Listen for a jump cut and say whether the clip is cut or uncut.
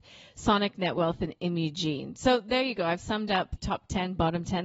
cut